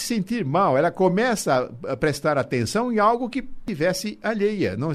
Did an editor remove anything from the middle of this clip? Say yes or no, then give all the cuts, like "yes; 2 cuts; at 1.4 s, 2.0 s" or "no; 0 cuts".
yes; 1 cut; at 3.7 s